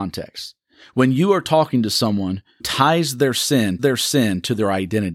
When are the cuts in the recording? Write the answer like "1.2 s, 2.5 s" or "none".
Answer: 2.6 s, 3.8 s